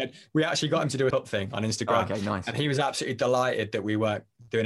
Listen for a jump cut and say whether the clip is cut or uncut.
cut